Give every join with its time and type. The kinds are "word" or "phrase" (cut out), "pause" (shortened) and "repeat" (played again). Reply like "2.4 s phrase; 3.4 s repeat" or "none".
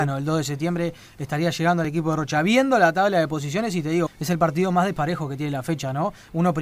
4.1 s word